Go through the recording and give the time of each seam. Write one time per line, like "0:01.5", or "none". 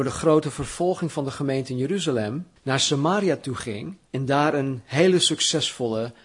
0:02.6
0:04.1